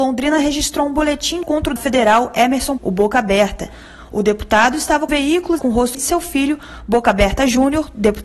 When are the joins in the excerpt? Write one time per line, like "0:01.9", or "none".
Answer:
0:01.4
0:01.8
0:02.8
0:05.1
0:05.6
0:05.9